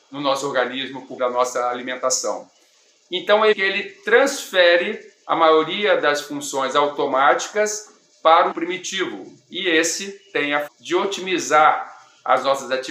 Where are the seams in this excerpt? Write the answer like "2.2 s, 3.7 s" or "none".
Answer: 1.2 s, 3.5 s, 8.5 s, 10.7 s